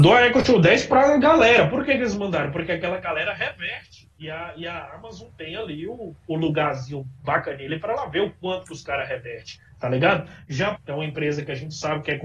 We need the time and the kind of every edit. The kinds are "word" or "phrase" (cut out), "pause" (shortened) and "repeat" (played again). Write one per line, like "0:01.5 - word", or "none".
0:10.7 - phrase